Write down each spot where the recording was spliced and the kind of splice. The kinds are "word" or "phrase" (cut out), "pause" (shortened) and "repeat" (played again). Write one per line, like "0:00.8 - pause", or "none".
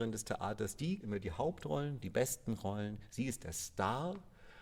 0:01.0 - word